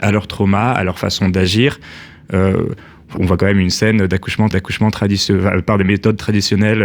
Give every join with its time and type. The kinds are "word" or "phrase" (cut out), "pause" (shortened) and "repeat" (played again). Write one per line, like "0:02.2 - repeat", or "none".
0:03.2 - word
0:04.5 - repeat